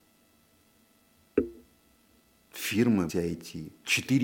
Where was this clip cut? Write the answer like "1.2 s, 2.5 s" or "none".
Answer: 3.1 s